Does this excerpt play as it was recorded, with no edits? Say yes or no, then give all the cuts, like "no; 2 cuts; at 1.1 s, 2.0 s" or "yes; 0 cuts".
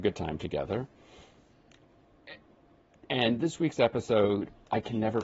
yes; 0 cuts